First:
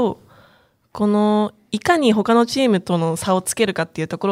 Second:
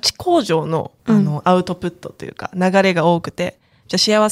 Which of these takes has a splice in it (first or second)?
second